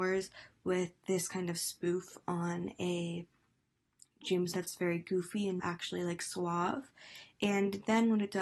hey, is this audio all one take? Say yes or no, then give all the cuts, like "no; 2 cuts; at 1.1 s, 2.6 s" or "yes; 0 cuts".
no; 2 cuts; at 4.5 s, 5.6 s